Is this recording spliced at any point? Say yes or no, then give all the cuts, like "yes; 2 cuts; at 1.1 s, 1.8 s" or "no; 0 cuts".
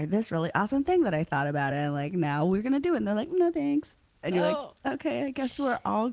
no; 0 cuts